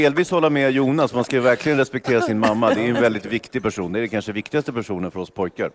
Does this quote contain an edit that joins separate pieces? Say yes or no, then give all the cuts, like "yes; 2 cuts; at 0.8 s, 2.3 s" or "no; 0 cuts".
no; 0 cuts